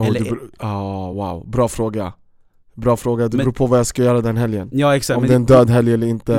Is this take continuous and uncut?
yes; 0 cuts

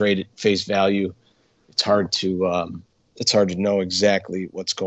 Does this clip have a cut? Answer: no; 0 cuts

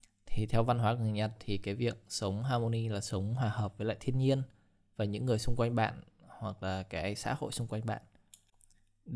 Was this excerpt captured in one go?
yes; 0 cuts

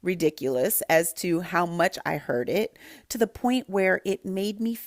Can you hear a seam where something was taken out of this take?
no; 0 cuts

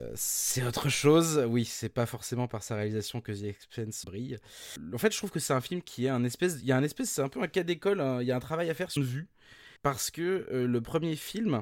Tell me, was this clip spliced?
yes; 3 cuts; at 4.0 s, 9.0 s, 9.8 s

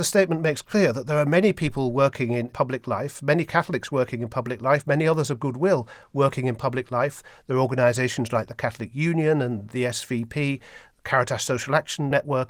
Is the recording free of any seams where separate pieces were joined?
yes; 0 cuts

